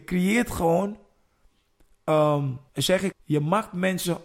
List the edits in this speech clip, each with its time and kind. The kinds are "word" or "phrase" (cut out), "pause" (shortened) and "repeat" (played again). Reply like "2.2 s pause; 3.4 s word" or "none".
2.7 s pause; 3.1 s phrase